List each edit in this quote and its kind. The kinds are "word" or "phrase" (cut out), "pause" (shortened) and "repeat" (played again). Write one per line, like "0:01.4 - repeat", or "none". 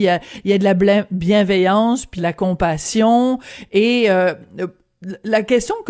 0:02.2 - phrase